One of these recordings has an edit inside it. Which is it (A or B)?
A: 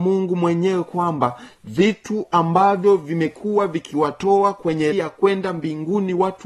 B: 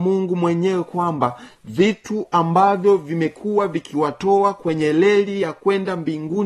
A